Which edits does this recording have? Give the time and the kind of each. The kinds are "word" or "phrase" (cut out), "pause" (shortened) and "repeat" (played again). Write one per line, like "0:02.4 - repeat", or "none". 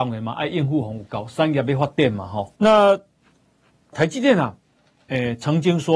0:02.6 - pause
0:03.9 - word